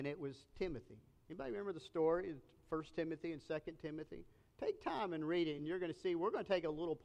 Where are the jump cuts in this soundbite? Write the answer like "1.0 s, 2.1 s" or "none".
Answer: none